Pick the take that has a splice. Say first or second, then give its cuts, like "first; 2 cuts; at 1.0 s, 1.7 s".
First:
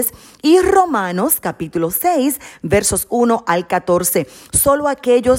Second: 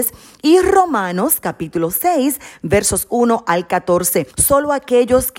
second; 1 cut; at 4.3 s